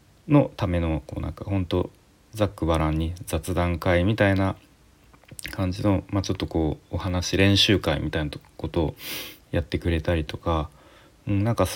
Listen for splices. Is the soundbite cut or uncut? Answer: cut